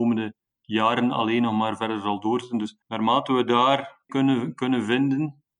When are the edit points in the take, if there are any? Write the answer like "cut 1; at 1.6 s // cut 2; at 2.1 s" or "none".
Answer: cut 1; at 2.8 s // cut 2; at 4.1 s